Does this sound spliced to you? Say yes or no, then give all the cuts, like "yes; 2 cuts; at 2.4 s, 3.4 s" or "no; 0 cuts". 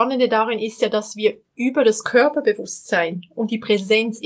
no; 0 cuts